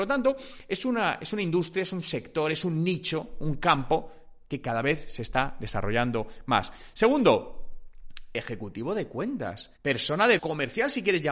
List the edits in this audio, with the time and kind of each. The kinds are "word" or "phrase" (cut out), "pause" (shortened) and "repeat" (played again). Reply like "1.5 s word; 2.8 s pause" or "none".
9.8 s pause; 10.4 s word